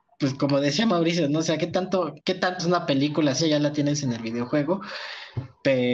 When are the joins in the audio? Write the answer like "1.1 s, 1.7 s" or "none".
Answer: 2.2 s, 2.6 s, 3.4 s